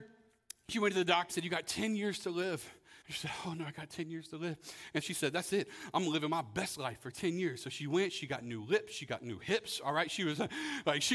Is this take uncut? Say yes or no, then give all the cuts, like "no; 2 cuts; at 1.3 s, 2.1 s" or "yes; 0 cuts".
no; 3 cuts; at 1.3 s, 3.0 s, 5.0 s